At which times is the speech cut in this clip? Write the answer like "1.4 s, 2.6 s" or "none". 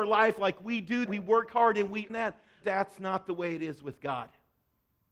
1.1 s, 2.1 s, 2.6 s